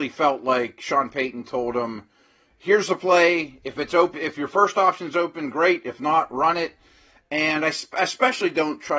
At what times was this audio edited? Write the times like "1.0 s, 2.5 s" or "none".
4.1 s